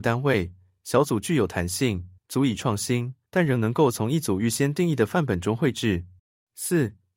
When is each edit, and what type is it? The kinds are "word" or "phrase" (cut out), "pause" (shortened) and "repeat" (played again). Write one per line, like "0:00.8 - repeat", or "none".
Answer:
0:02.2 - pause
0:03.3 - pause
0:06.2 - pause